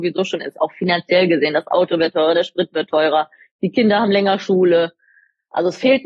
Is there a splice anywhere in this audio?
no; 0 cuts

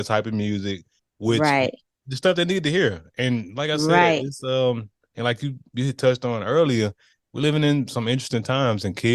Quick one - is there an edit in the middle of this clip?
no; 0 cuts

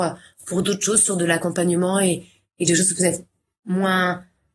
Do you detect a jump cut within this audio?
no; 0 cuts

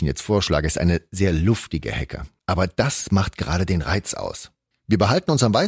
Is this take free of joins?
yes; 0 cuts

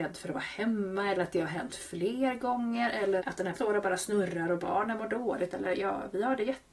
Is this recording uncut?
no; 2 cuts; at 3.2 s, 3.5 s

